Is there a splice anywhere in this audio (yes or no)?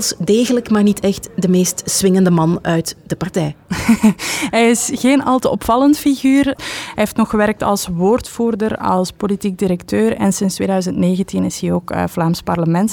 no